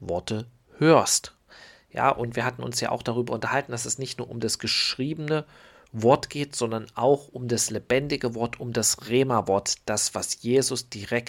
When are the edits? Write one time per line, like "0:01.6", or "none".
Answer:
none